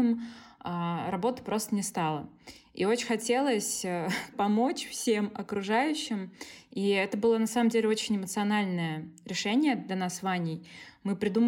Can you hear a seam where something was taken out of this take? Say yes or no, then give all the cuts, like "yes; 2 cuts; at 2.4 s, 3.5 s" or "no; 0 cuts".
yes; 1 cut; at 4.3 s